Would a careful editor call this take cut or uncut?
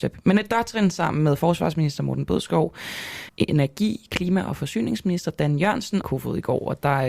cut